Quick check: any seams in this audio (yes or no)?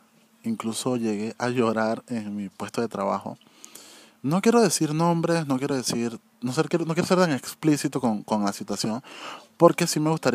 no